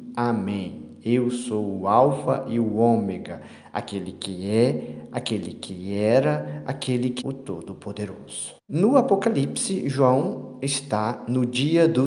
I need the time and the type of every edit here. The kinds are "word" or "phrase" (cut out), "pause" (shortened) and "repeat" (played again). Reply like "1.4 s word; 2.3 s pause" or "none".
7.2 s word; 8.6 s pause